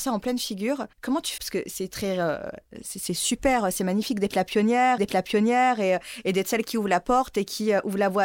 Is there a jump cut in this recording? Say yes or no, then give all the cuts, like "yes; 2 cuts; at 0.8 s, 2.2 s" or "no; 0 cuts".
yes; 3 cuts; at 0.9 s, 1.4 s, 5.0 s